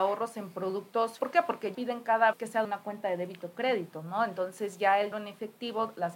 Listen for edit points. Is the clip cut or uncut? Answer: cut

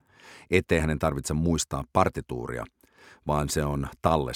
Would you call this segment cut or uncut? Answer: uncut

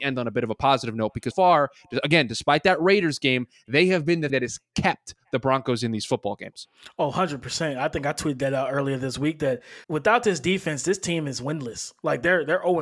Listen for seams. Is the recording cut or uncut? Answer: cut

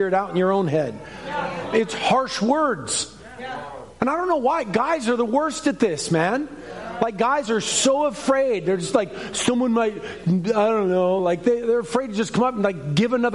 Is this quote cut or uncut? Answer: uncut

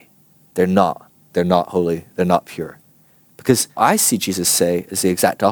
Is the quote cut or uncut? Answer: cut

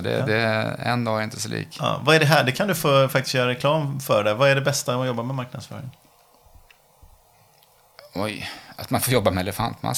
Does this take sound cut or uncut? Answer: uncut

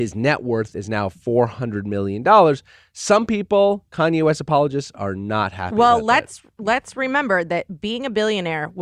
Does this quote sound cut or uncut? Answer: uncut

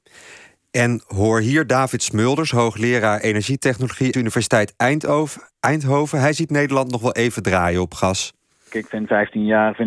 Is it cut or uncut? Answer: cut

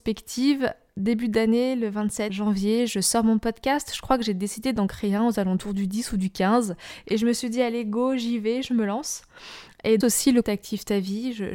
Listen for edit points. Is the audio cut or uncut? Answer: cut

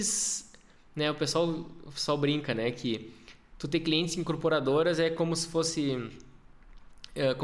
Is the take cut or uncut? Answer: uncut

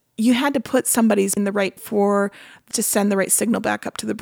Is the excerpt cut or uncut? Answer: cut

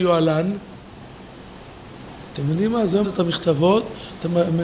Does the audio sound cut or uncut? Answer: cut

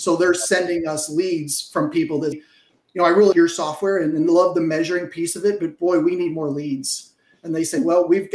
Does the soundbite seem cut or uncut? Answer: cut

